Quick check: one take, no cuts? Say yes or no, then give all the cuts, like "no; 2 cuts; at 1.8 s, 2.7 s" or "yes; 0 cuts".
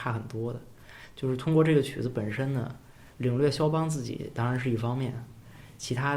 no; 1 cut; at 3.1 s